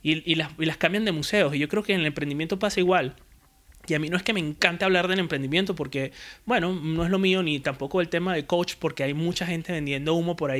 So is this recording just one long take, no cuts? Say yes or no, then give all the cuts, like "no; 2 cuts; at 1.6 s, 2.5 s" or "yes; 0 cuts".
yes; 0 cuts